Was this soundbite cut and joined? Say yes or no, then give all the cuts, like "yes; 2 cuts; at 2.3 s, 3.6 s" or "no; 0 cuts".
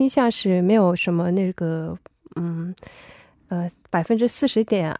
no; 0 cuts